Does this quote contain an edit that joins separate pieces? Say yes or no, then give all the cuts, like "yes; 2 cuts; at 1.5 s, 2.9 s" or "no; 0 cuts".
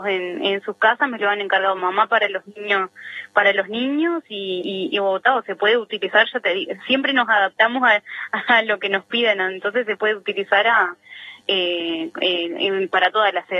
no; 0 cuts